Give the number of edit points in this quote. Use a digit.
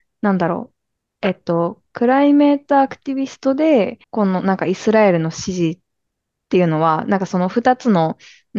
1